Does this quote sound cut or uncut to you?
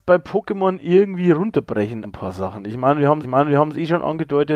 cut